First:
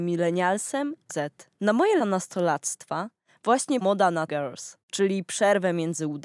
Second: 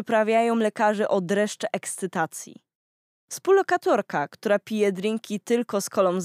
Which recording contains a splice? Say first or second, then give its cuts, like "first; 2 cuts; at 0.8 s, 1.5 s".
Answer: first; 6 cuts; at 1.1 s, 1.5 s, 2.0 s, 3.8 s, 4.3 s, 4.8 s